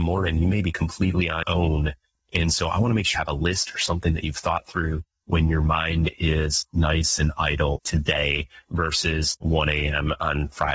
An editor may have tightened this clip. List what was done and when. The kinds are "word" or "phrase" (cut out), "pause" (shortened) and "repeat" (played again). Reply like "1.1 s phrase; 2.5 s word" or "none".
1.4 s word; 3.1 s word; 7.8 s word; 9.4 s word